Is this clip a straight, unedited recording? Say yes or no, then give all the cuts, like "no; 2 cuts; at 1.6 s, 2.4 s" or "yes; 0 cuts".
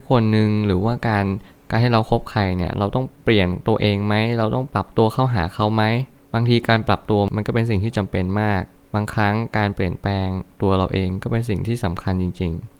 yes; 0 cuts